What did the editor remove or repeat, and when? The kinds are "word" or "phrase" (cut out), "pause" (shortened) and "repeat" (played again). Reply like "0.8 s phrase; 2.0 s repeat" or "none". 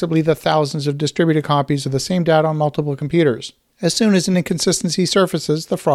none